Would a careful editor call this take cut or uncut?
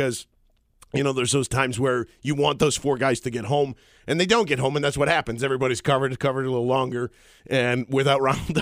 uncut